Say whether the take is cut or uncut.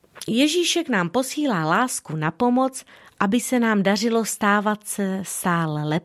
uncut